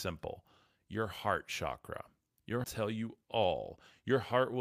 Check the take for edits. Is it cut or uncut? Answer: cut